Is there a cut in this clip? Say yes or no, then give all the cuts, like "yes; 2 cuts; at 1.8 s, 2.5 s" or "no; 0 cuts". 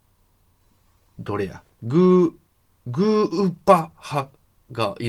no; 0 cuts